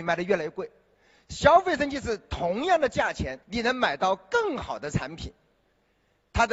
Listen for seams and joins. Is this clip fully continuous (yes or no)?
no